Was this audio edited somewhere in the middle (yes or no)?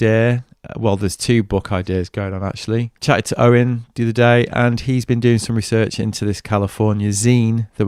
yes